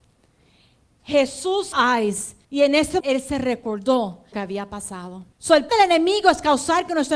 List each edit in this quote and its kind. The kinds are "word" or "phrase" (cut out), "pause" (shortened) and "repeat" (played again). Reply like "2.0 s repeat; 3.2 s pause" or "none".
1.7 s phrase; 2.4 s pause; 3.0 s word; 4.3 s phrase; 5.3 s pause; 5.7 s word